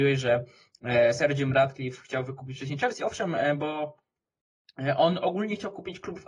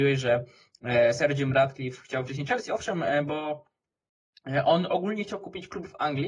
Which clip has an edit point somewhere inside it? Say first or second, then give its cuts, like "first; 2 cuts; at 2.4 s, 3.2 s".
second; 1 cut; at 2.3 s